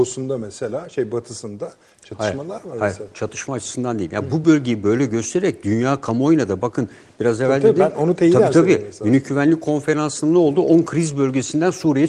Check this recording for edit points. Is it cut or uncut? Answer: uncut